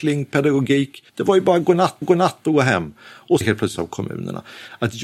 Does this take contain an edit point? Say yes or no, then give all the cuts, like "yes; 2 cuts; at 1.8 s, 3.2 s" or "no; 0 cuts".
yes; 4 cuts; at 1.1 s, 2.0 s, 3.4 s, 3.8 s